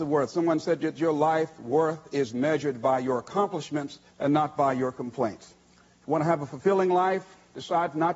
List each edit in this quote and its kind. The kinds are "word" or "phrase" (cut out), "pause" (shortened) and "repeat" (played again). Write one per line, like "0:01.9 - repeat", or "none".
0:04.1 - pause
0:05.6 - pause